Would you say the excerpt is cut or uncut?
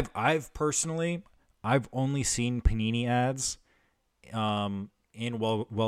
uncut